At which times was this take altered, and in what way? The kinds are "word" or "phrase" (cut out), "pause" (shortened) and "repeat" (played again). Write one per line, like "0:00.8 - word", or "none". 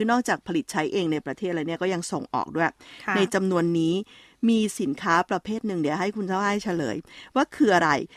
none